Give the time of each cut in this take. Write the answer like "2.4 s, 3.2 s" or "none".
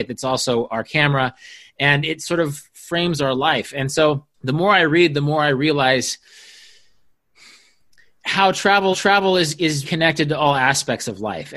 4.3 s, 8.9 s, 9.8 s